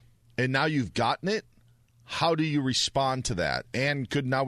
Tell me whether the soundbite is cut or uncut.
uncut